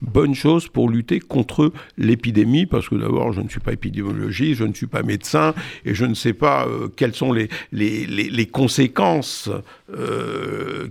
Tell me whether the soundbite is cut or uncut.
uncut